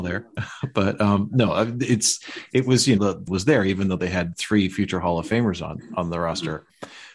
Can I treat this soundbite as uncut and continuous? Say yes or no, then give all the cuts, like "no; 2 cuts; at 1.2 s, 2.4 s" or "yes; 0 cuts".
no; 2 cuts; at 3.0 s, 3.3 s